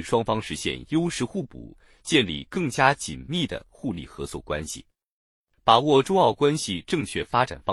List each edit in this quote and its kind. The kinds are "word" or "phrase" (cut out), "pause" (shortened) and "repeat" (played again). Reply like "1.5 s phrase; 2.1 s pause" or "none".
none